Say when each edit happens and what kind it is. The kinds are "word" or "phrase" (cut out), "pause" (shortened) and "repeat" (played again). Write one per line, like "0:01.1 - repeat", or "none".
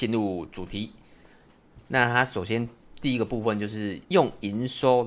0:04.0 - pause